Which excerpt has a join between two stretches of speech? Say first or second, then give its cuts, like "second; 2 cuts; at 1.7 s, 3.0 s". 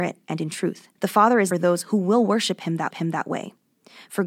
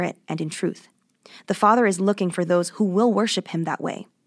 first; 3 cuts; at 1.0 s, 1.5 s, 2.9 s